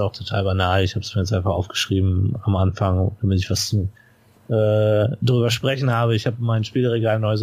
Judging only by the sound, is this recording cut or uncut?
uncut